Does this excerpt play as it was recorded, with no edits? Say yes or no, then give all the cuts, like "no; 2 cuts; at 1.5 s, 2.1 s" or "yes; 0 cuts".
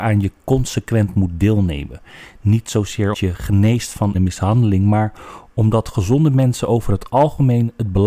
no; 2 cuts; at 3.1 s, 4.1 s